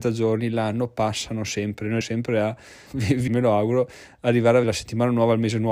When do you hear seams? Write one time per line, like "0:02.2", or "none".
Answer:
0:02.0
0:02.9
0:03.3
0:04.6